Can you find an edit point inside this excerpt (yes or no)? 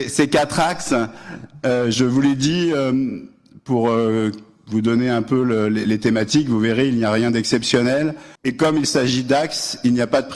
yes